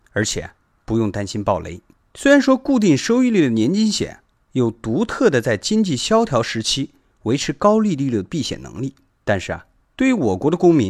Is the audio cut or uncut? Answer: uncut